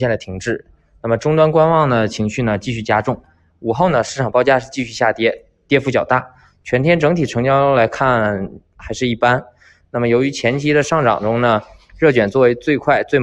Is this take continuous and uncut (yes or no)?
yes